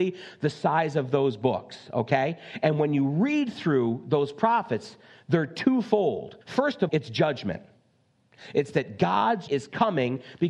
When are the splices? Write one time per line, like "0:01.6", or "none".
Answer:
0:06.4
0:06.9
0:09.5